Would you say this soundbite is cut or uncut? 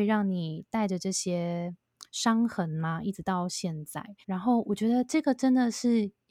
cut